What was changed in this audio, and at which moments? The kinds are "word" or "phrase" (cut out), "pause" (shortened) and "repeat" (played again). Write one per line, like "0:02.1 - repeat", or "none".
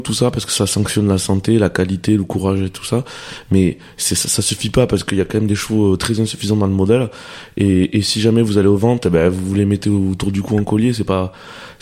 none